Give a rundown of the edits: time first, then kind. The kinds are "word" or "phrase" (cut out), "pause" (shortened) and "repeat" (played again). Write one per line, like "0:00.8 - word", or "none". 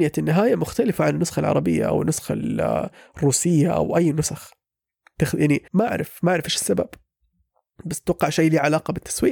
0:05.7 - pause